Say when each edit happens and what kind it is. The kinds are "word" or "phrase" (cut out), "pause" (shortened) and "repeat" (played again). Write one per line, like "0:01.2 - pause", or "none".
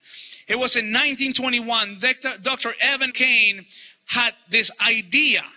0:03.1 - word